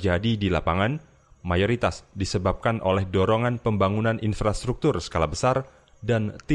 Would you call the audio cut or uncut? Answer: uncut